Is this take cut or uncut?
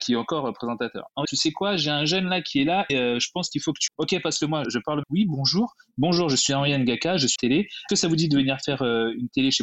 cut